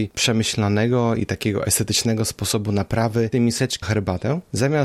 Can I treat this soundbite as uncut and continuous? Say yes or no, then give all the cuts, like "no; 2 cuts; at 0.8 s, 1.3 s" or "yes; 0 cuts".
no; 2 cuts; at 3.3 s, 3.8 s